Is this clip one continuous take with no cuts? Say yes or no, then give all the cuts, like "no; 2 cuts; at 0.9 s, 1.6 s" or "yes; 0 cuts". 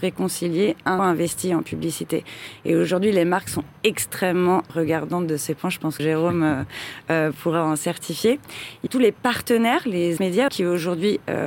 no; 6 cuts; at 1.0 s, 4.7 s, 6.0 s, 8.9 s, 10.2 s, 10.5 s